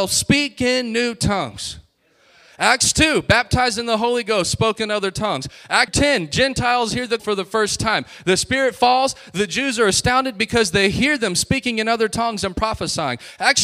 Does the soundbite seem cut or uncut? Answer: cut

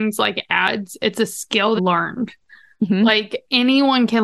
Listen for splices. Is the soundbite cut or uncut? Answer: cut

